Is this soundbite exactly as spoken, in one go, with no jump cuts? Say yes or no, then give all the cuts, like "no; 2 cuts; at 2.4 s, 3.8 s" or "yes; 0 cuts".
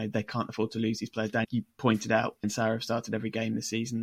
no; 2 cuts; at 1.4 s, 2.4 s